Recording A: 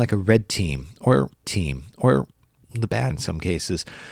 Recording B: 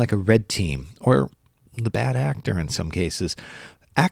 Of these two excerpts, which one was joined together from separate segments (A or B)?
A